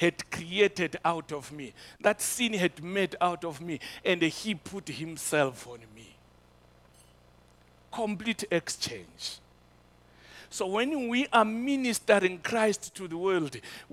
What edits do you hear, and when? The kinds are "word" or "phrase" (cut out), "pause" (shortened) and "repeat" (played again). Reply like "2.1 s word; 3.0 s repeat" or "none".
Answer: none

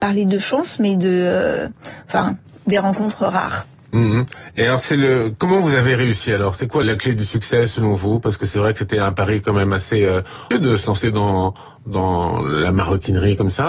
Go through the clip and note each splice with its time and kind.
6.8 s word; 10.5 s word

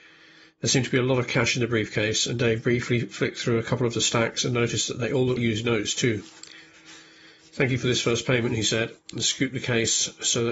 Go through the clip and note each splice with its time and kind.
5.4 s word

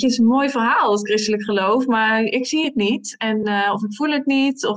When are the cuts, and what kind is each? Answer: none

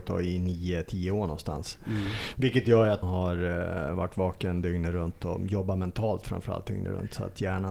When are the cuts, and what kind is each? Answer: 3.0 s word

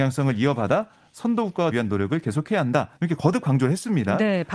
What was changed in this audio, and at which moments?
1.7 s word; 3.0 s pause

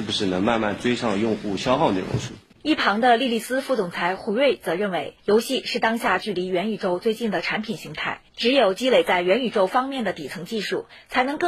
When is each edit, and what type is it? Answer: 2.5 s pause; 5.2 s pause; 8.3 s pause

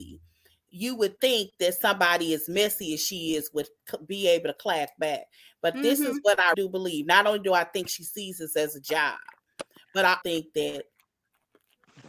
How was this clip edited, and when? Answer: 6.5 s word; 10.2 s word

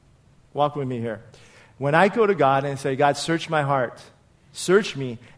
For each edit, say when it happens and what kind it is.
none

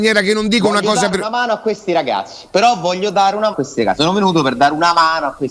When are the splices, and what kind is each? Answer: 3.5 s phrase

